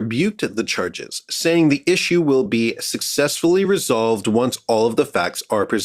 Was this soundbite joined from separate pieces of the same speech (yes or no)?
no